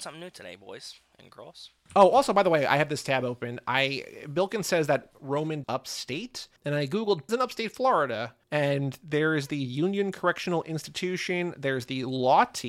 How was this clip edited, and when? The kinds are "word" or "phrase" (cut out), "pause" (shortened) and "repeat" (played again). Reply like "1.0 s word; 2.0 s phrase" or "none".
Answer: 5.6 s phrase; 6.6 s pause; 7.3 s word; 8.4 s pause